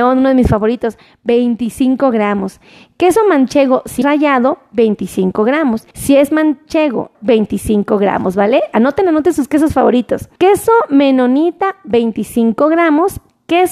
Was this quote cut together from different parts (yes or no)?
yes